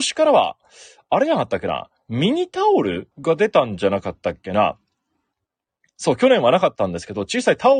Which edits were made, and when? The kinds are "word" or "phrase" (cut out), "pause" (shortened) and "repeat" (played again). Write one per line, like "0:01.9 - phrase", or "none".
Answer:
0:03.1 - pause